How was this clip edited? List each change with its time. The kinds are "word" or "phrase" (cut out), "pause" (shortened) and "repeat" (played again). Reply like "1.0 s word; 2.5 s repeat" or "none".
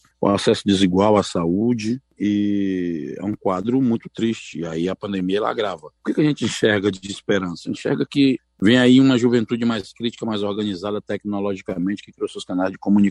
6.0 s pause